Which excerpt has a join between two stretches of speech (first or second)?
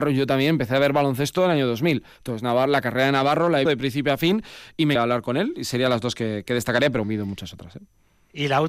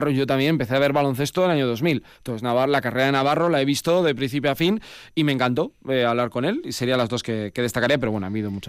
first